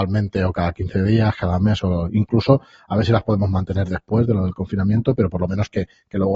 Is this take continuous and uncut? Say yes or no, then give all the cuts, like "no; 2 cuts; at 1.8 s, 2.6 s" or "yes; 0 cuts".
yes; 0 cuts